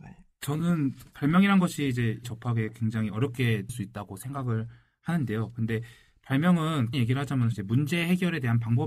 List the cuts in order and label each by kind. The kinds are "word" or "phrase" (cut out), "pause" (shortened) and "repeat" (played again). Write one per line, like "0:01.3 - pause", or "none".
0:01.1 - word
0:02.2 - word
0:03.7 - word
0:06.9 - word
0:07.5 - word